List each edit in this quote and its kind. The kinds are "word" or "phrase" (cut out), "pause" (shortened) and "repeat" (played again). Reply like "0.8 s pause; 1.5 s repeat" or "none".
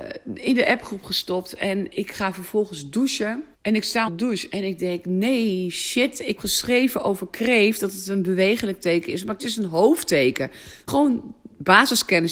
3.5 s pause; 4.1 s word; 6.4 s word; 9.4 s word; 10.9 s word